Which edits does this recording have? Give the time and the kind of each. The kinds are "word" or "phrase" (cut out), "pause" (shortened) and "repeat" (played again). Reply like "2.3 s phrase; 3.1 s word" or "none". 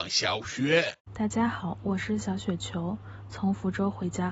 1.0 s pause